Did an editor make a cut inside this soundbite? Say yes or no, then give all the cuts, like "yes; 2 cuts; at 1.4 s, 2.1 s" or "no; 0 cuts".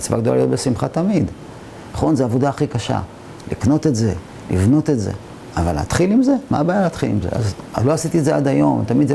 no; 0 cuts